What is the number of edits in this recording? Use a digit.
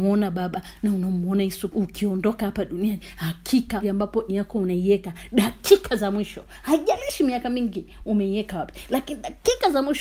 3